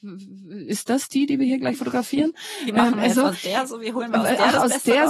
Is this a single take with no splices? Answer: yes; 0 cuts

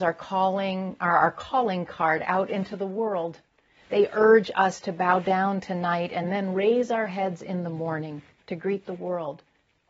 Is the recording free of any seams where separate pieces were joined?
yes; 0 cuts

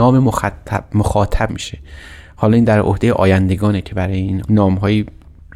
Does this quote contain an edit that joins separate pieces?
yes; 2 cuts; at 1.5 s, 4.4 s

